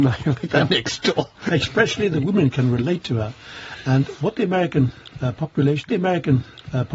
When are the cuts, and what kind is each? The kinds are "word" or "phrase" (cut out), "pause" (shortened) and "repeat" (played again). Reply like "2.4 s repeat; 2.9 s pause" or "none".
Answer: 5.9 s repeat